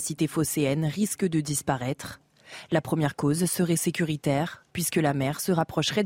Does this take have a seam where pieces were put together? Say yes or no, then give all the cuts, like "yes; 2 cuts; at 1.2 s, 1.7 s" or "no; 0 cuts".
yes; 1 cut; at 4.7 s